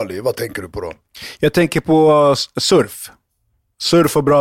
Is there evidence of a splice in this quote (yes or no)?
no